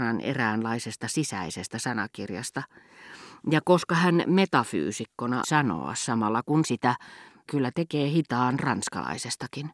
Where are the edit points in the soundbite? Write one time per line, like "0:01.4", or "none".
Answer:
0:05.4
0:06.6
0:07.5